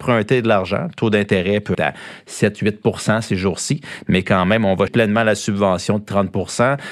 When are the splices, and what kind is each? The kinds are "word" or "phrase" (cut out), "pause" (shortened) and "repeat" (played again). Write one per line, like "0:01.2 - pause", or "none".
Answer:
0:01.7 - word
0:04.9 - word